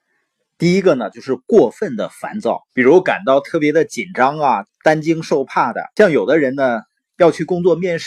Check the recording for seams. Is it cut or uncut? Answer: cut